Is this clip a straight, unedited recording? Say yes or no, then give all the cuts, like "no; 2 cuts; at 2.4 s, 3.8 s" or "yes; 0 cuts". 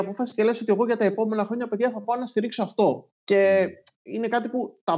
no; 1 cut; at 3.1 s